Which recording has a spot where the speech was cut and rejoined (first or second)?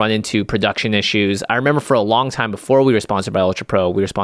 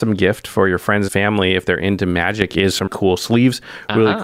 second